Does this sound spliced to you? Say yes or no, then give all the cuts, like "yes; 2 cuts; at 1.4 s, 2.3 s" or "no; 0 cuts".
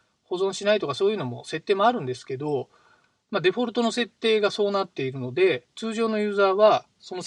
no; 0 cuts